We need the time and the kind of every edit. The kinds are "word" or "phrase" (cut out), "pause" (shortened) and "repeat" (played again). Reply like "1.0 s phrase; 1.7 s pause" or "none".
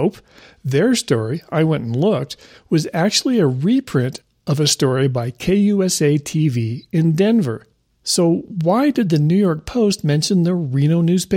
none